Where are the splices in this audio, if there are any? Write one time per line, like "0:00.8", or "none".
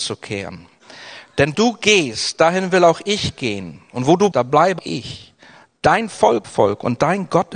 0:01.5
0:04.3
0:04.8
0:06.4